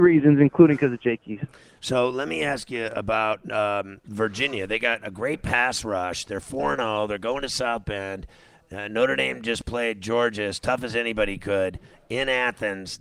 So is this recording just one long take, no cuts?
yes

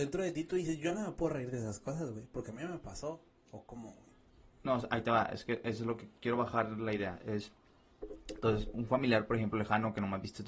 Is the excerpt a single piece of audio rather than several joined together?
yes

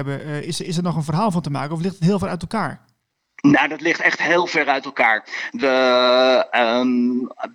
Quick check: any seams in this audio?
no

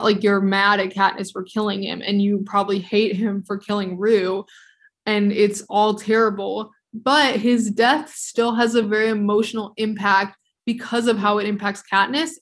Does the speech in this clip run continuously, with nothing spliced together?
yes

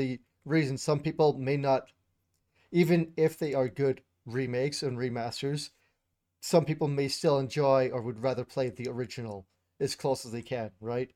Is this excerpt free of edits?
yes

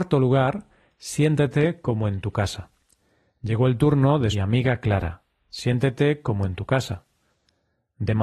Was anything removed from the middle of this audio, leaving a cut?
yes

